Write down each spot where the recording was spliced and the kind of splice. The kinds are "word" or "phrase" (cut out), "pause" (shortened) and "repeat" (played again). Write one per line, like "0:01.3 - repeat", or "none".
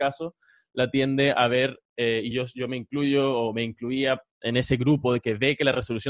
none